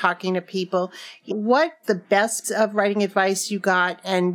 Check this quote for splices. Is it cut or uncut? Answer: cut